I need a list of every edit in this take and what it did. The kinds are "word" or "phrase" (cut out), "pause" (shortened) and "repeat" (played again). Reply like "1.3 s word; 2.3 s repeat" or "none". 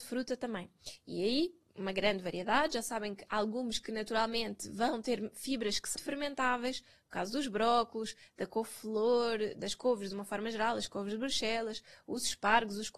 1.7 s pause; 6.0 s word